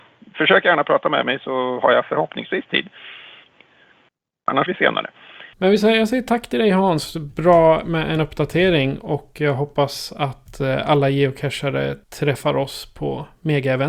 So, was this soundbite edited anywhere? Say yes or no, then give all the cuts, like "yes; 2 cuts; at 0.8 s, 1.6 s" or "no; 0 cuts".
yes; 4 cuts; at 4.7 s, 5.5 s, 8.2 s, 12.0 s